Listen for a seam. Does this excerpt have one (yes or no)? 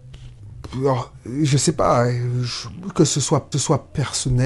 yes